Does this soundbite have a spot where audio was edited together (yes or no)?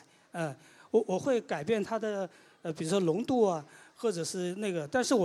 no